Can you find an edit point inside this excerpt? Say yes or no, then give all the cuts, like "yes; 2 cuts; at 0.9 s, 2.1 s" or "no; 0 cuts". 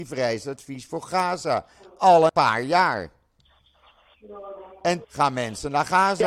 yes; 2 cuts; at 2.3 s, 5.0 s